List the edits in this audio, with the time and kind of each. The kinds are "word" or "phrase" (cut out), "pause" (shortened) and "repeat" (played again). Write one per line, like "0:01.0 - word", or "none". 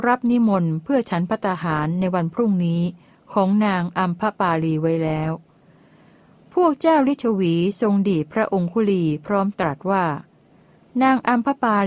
none